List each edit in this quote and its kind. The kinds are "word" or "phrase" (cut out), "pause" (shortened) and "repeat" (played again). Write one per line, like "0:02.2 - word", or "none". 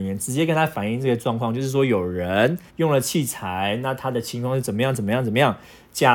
0:02.7 - pause